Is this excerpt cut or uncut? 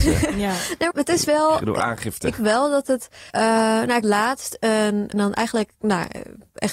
cut